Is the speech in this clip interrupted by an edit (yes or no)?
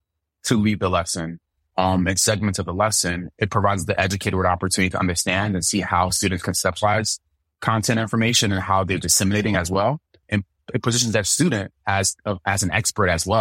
no